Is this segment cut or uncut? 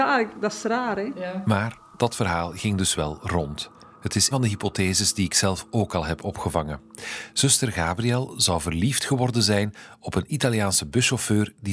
cut